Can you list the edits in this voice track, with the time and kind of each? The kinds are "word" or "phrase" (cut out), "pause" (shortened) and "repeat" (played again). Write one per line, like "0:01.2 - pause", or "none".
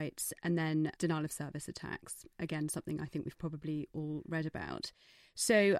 none